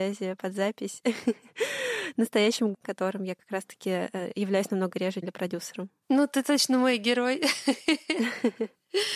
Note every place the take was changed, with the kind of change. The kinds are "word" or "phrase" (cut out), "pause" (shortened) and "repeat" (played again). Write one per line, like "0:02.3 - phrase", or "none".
0:02.7 - word
0:05.2 - phrase